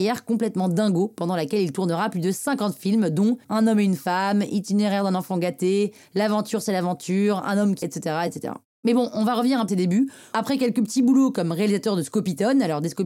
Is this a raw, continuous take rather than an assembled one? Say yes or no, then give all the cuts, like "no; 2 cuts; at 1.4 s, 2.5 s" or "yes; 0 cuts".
no; 4 cuts; at 3.4 s, 7.8 s, 8.3 s, 9.7 s